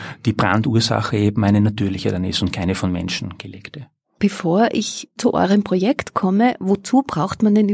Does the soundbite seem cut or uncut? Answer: uncut